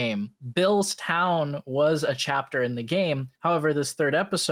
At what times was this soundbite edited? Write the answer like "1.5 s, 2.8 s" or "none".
3.3 s